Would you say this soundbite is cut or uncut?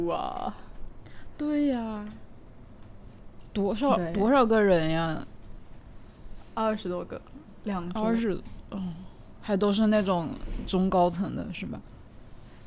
uncut